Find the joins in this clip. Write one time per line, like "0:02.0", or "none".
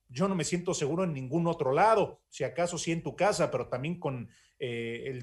none